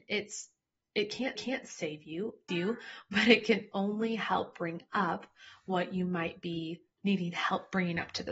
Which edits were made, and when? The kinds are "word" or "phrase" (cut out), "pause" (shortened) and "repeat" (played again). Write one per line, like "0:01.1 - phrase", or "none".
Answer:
0:01.4 - repeat
0:02.5 - phrase
0:06.9 - pause